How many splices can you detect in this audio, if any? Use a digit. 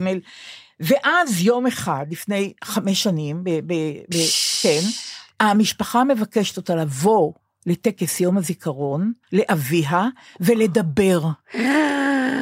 1